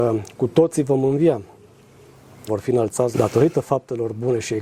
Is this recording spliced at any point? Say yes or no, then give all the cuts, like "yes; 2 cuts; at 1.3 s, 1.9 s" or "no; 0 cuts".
yes; 2 cuts; at 2.5 s, 3.1 s